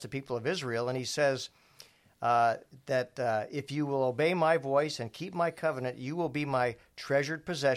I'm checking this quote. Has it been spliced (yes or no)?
no